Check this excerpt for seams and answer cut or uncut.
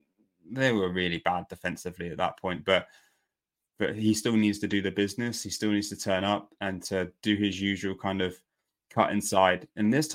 uncut